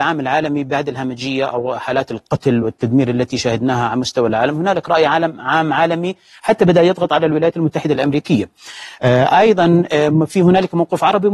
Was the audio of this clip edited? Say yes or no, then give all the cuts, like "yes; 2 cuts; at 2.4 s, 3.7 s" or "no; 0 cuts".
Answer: no; 0 cuts